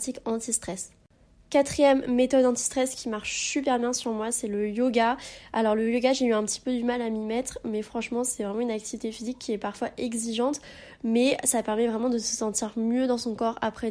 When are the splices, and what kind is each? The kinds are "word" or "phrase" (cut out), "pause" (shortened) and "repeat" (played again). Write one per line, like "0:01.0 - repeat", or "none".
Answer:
none